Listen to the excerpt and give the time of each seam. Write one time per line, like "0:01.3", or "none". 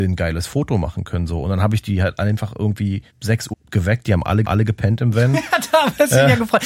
0:03.1
0:03.5
0:04.4